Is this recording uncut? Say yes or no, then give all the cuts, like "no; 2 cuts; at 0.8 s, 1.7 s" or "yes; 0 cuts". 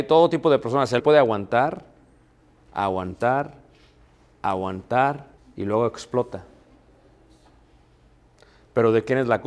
no; 2 cuts; at 1.0 s, 5.4 s